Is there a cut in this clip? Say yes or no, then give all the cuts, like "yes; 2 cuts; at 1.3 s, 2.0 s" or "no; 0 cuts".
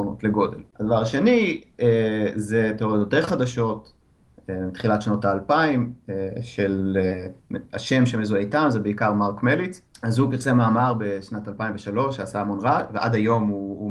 no; 0 cuts